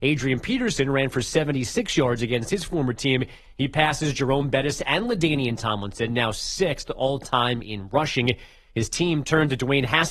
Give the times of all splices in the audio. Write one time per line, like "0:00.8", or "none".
none